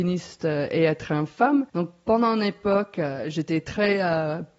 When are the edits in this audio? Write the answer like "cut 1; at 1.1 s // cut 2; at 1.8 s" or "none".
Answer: cut 1; at 1.7 s